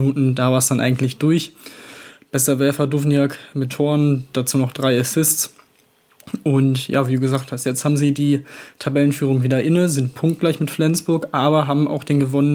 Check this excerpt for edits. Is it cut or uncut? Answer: cut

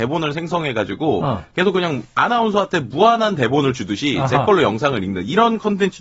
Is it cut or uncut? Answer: uncut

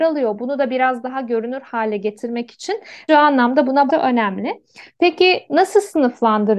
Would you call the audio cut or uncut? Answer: cut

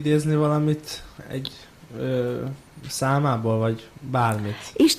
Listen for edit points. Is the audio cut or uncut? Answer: uncut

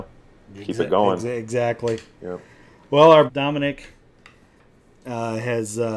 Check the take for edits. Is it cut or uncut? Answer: cut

